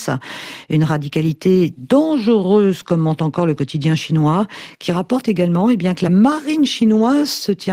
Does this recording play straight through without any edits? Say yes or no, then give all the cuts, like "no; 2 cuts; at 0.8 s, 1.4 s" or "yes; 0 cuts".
yes; 0 cuts